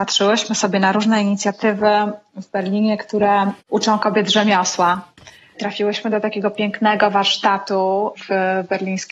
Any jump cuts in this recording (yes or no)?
no